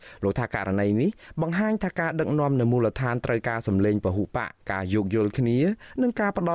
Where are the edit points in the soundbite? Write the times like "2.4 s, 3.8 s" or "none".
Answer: 4.6 s